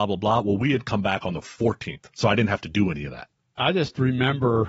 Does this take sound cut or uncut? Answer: uncut